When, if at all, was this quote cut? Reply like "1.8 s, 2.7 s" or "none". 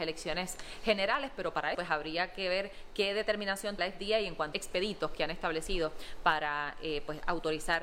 1.7 s, 3.8 s, 4.5 s